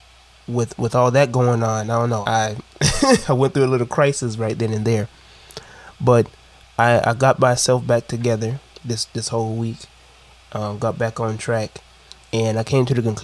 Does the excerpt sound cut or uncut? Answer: cut